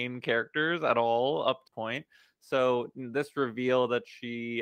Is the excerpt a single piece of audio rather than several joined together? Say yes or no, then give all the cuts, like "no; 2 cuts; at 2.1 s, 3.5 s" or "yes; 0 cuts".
no; 1 cut; at 1.7 s